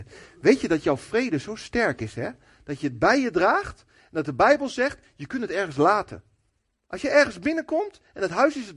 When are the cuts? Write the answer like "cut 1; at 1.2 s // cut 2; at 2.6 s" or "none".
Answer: none

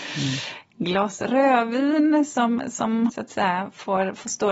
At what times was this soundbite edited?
cut 1; at 3.1 s

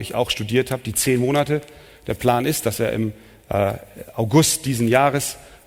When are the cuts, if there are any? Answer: none

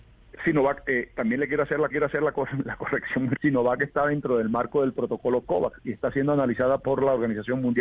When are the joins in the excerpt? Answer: cut 1; at 1.9 s // cut 2; at 3.4 s

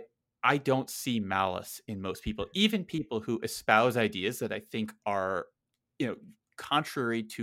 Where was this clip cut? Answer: none

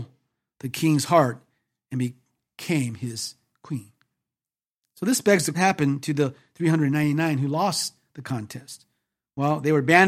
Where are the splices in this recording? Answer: cut 1; at 5.5 s

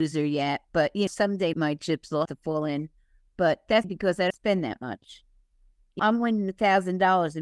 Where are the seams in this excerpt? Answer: cut 1; at 1.1 s // cut 2; at 1.5 s // cut 3; at 2.3 s // cut 4; at 3.8 s // cut 5; at 4.3 s // cut 6; at 6.0 s

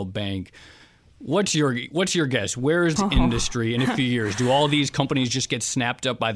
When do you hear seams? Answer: cut 1; at 3.0 s

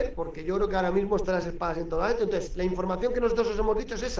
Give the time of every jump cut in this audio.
none

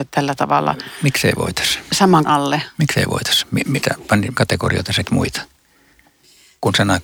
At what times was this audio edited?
cut 1; at 2.2 s // cut 2; at 3.8 s // cut 3; at 4.4 s // cut 4; at 5.0 s

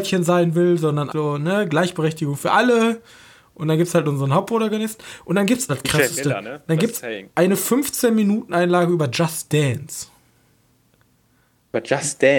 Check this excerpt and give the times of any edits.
cut 1; at 1.1 s // cut 2; at 5.7 s // cut 3; at 7.3 s

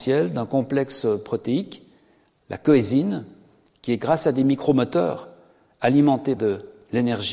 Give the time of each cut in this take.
cut 1; at 4.0 s // cut 2; at 6.4 s

